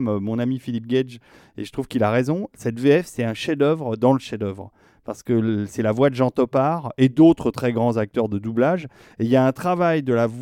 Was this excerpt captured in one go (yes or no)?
yes